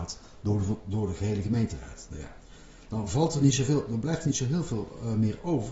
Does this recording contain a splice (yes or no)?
no